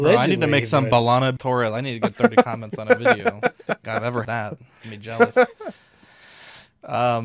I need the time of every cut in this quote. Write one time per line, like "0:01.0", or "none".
0:01.4
0:03.8
0:04.2
0:04.8